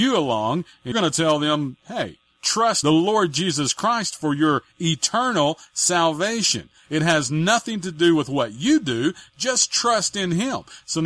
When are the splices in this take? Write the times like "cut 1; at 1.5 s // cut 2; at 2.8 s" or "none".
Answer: cut 1; at 0.9 s // cut 2; at 2.8 s